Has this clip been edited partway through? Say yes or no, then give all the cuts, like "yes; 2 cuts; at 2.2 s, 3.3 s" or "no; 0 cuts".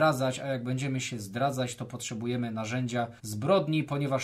yes; 1 cut; at 3.2 s